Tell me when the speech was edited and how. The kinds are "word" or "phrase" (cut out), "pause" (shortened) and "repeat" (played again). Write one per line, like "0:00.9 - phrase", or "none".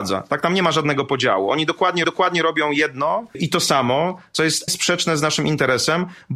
0:02.0 - repeat
0:03.3 - word
0:04.7 - word